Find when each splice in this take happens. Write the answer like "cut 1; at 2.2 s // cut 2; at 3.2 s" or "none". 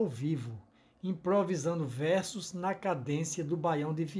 none